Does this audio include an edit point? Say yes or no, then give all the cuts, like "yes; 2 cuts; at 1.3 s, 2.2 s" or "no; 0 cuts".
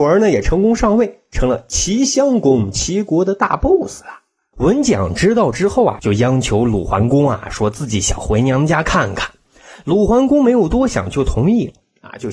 no; 0 cuts